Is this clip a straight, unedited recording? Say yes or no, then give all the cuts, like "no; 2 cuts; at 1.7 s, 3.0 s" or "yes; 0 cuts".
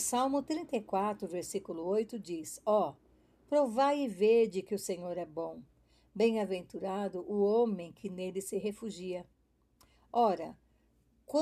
yes; 0 cuts